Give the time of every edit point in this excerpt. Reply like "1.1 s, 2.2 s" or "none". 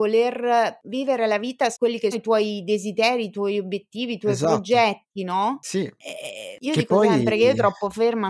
1.7 s, 2.1 s